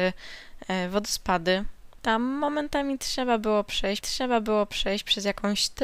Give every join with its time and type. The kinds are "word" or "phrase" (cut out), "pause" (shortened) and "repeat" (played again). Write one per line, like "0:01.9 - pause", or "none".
0:04.0 - repeat